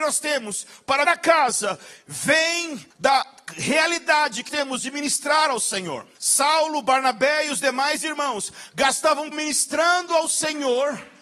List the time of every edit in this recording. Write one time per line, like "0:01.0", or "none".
0:01.1
0:02.9
0:04.5
0:06.2
0:09.3

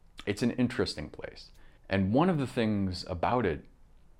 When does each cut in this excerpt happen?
0:01.8

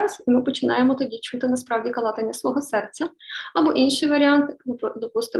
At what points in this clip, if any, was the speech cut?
none

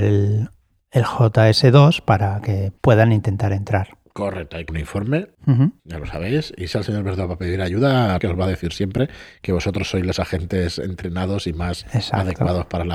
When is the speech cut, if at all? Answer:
0:02.8
0:04.7
0:05.3
0:05.8
0:06.7
0:08.2

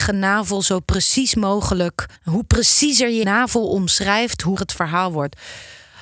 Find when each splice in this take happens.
0:02.2
0:03.2
0:04.6

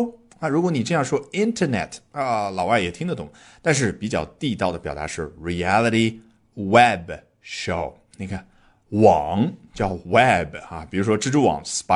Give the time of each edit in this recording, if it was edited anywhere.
none

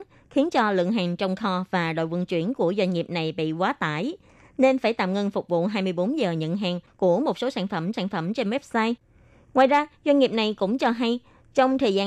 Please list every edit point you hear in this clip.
0:07.9

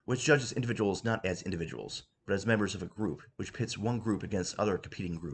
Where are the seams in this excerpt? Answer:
0:03.3

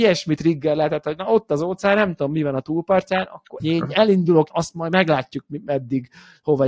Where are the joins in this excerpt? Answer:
0:03.6
0:04.5

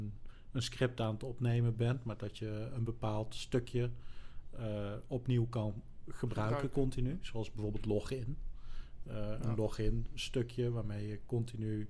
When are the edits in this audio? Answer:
none

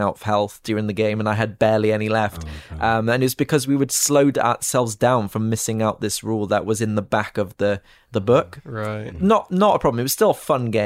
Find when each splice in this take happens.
none

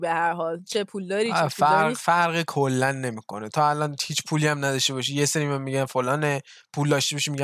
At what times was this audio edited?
none

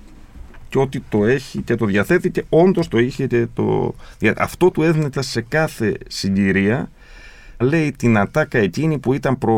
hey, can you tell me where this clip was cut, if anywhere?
0:05.1
0:07.6

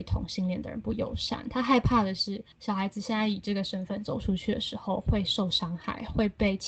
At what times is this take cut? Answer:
0:02.5

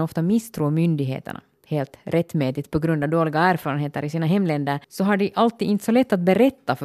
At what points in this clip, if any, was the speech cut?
0:04.8

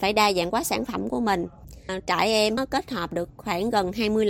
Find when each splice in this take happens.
none

